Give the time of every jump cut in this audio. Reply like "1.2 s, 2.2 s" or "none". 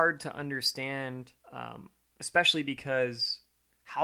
1.4 s